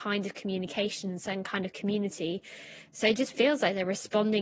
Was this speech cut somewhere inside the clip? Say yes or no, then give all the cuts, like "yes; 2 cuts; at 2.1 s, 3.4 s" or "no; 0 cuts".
no; 0 cuts